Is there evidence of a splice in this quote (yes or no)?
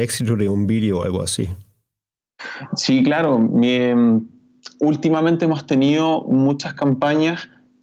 no